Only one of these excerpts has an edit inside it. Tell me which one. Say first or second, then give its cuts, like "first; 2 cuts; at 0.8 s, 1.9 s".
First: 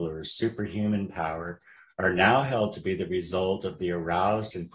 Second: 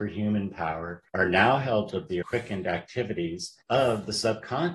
second; 4 cuts; at 1.1 s, 1.9 s, 2.2 s, 3.6 s